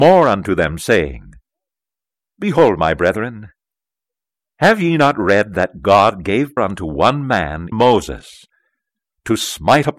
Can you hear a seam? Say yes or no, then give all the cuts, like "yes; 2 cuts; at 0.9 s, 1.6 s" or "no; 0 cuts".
yes; 2 cuts; at 6.6 s, 7.7 s